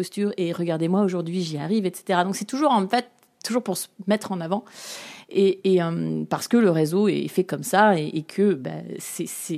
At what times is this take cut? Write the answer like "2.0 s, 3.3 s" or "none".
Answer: none